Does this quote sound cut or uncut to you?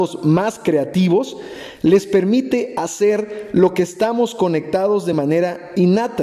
uncut